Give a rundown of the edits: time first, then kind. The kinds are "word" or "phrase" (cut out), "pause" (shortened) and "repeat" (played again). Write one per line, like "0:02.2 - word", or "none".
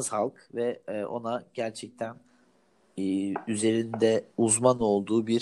0:04.3 - pause